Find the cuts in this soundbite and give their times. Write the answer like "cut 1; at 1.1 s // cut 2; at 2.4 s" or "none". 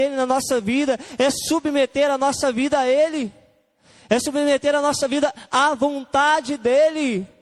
none

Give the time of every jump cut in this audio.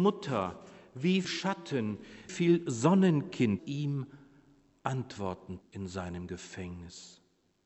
cut 1; at 1.2 s // cut 2; at 2.3 s // cut 3; at 3.6 s // cut 4; at 5.6 s

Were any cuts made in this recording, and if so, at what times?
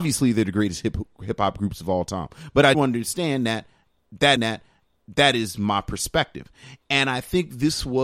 cut 1; at 2.7 s // cut 2; at 4.4 s

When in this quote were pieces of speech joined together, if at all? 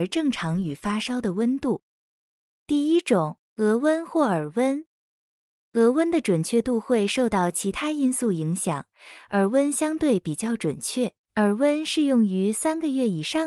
cut 1; at 3.5 s // cut 2; at 11.1 s

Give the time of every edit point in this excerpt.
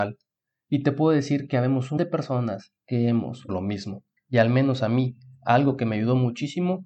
cut 1; at 2.0 s // cut 2; at 2.8 s // cut 3; at 3.5 s // cut 4; at 4.2 s

